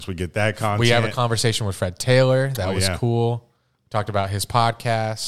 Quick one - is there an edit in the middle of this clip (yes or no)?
no